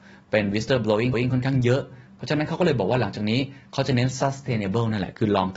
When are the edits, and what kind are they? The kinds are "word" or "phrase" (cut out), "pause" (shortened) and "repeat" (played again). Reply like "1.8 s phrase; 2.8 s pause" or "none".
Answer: 1.1 s repeat